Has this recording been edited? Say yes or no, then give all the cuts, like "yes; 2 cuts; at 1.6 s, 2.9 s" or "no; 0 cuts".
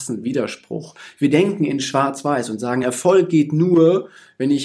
no; 0 cuts